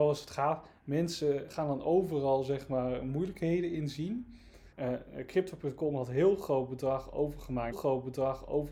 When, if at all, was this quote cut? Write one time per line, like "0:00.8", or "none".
0:01.5
0:04.7
0:07.7